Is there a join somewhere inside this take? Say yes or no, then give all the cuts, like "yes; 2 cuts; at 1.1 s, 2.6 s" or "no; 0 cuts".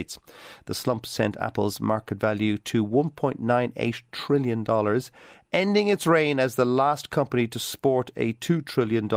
no; 0 cuts